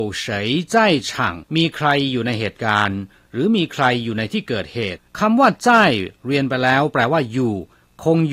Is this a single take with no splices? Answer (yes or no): no